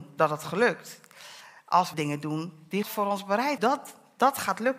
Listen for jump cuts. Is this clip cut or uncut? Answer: cut